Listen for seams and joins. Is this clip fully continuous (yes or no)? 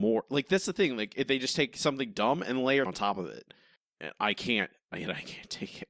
no